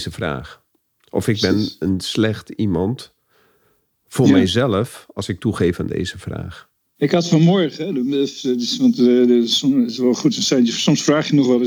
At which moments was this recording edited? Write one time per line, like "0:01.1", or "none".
none